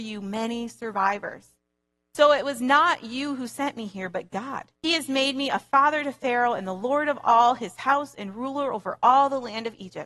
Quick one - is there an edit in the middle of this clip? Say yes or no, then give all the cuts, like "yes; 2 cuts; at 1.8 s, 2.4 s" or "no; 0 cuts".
yes; 1 cut; at 4.7 s